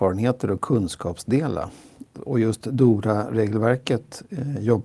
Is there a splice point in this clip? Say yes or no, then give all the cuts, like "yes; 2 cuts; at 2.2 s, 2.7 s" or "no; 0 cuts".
no; 0 cuts